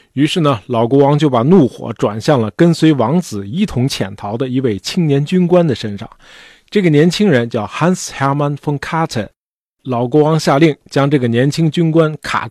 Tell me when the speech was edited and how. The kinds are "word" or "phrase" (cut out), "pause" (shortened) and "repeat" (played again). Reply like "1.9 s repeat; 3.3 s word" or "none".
none